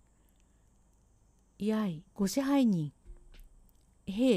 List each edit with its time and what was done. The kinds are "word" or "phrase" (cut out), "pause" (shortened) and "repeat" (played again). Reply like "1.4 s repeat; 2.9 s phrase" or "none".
2.1 s pause; 3.0 s pause